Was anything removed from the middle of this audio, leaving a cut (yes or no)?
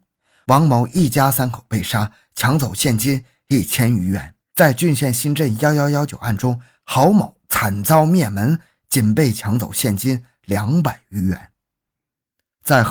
yes